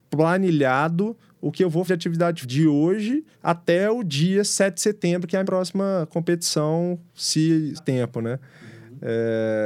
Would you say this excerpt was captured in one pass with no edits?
no; 5 cuts; at 1.9 s, 2.4 s, 3.3 s, 5.4 s, 7.8 s

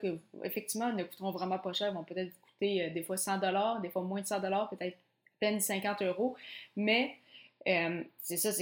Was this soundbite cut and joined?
no; 0 cuts

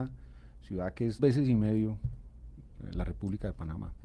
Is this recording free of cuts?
no; 1 cut; at 1.2 s

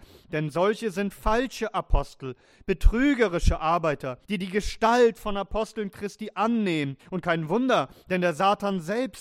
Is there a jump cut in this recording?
yes; 2 cuts; at 4.2 s, 7.0 s

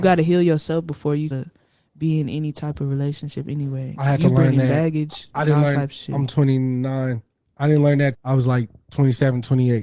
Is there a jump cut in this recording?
yes; 2 cuts; at 1.3 s, 8.1 s

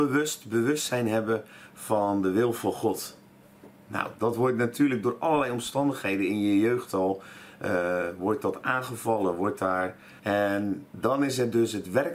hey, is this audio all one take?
no; 1 cut; at 10.2 s

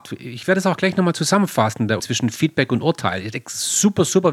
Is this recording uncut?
no; 1 cut; at 2.0 s

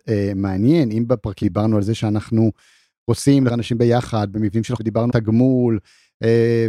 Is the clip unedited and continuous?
no; 4 cuts; at 1.4 s, 3.5 s, 4.8 s, 5.1 s

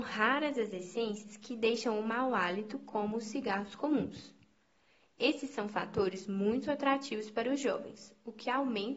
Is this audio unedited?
yes; 0 cuts

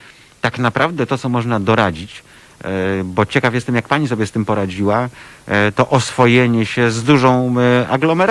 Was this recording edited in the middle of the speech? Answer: no; 0 cuts

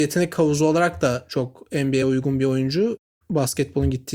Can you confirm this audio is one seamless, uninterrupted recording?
yes; 0 cuts

